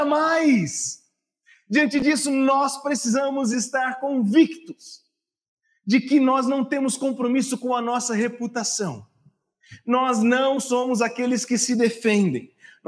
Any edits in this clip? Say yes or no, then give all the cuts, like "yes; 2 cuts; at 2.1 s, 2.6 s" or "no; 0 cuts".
no; 0 cuts